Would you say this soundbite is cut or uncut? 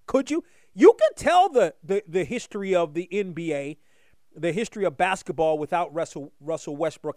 uncut